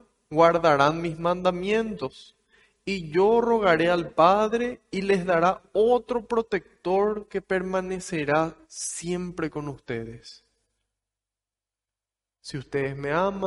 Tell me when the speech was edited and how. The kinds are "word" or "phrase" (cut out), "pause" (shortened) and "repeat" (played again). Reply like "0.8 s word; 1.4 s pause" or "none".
8.6 s pause